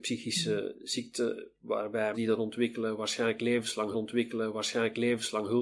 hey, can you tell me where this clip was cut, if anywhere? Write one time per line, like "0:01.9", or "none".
0:02.1
0:03.9